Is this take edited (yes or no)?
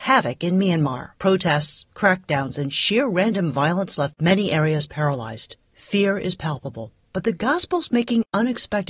yes